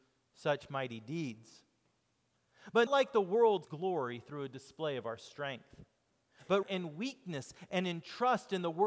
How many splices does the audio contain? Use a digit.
3